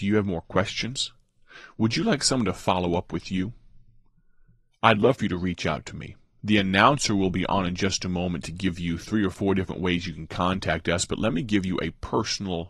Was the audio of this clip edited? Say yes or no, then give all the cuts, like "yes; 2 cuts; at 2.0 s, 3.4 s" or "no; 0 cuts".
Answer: no; 0 cuts